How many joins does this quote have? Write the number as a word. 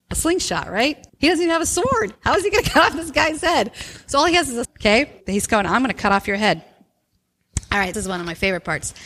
five